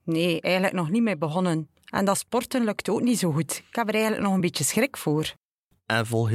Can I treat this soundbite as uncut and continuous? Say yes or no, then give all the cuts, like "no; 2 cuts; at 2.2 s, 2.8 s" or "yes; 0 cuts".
yes; 0 cuts